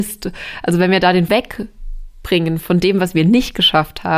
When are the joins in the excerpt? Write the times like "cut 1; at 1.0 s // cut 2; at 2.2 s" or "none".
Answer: cut 1; at 1.3 s